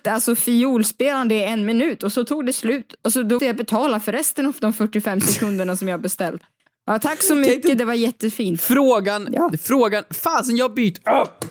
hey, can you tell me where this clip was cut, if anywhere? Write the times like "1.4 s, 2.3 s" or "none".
3.4 s